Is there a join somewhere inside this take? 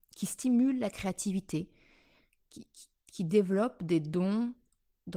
no; 0 cuts

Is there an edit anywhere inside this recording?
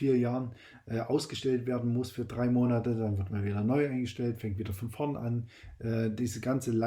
no; 0 cuts

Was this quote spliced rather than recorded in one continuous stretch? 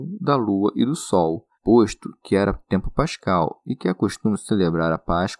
yes; 1 cut; at 1.5 s

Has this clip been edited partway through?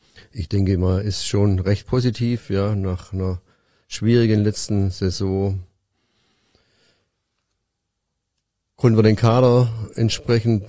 no; 0 cuts

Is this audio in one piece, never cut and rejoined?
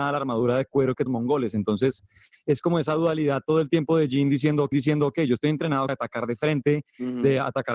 no; 3 cuts; at 1.1 s, 4.7 s, 5.9 s

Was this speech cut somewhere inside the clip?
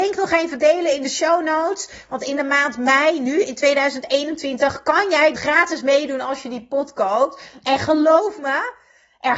yes; 1 cut; at 5.4 s

